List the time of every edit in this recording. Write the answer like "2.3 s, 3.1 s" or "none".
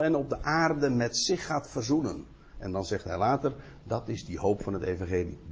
none